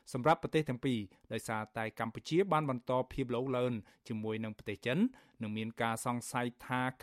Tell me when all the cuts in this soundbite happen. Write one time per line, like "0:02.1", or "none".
none